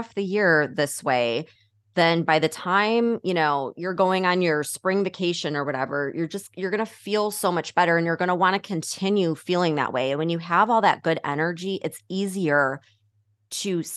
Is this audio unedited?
yes; 0 cuts

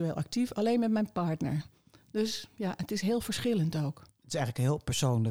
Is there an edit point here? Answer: no; 0 cuts

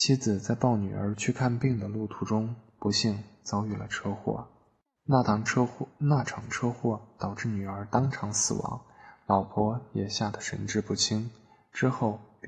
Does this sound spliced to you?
no; 0 cuts

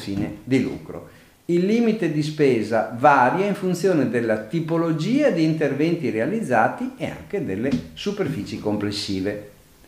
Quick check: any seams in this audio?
no; 0 cuts

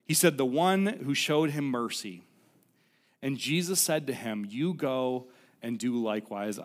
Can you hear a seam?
no; 0 cuts

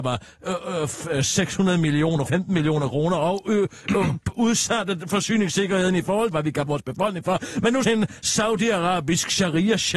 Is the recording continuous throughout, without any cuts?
no; 4 cuts; at 2.3 s, 6.3 s, 6.7 s, 7.8 s

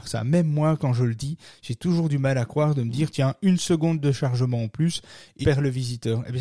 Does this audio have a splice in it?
yes; 1 cut; at 5.4 s

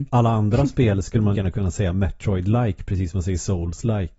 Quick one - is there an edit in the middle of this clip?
yes; 1 cut; at 1.3 s

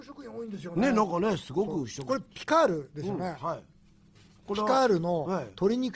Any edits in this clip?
no; 0 cuts

